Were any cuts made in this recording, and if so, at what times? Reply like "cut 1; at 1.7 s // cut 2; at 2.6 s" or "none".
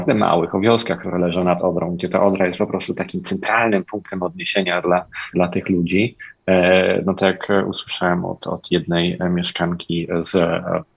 cut 1; at 5.3 s